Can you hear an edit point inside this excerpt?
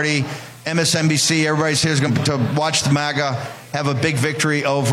yes; 1 cut; at 2.1 s

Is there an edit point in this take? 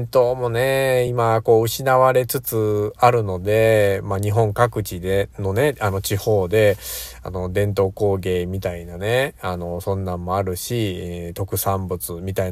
no; 0 cuts

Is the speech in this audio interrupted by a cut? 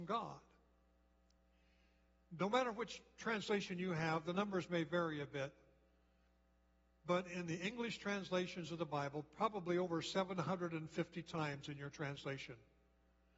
no; 0 cuts

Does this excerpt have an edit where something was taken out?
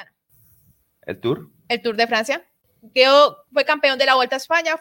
no; 0 cuts

